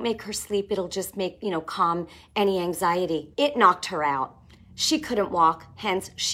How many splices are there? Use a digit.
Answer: 1